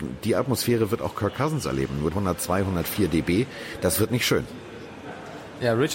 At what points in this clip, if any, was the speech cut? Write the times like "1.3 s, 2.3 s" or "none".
2.1 s